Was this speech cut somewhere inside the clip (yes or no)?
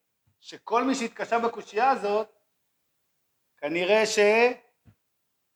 no